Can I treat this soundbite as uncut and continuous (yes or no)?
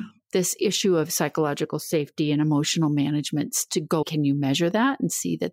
no